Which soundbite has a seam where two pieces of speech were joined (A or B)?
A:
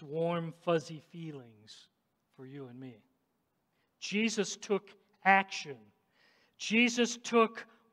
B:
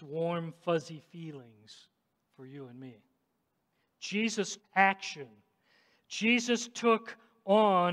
B